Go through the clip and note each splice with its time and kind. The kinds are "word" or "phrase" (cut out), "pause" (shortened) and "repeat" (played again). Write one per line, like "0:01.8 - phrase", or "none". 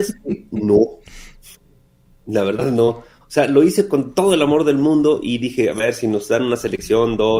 none